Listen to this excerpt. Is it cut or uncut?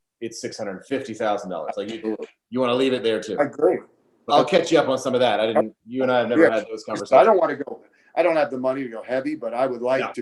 cut